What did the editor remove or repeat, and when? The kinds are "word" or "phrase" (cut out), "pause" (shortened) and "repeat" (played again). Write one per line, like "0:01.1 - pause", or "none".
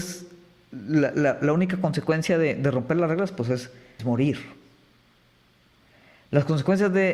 0:04.0 - word

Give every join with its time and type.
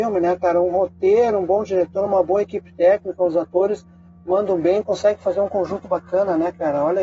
none

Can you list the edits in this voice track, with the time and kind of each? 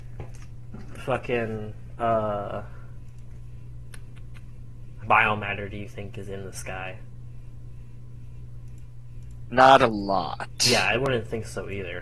0:05.0 - word

